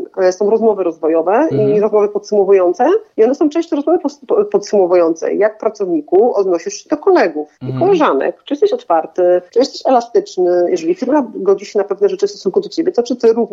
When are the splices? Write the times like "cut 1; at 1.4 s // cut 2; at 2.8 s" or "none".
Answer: cut 1; at 3.1 s // cut 2; at 7.5 s // cut 3; at 9.5 s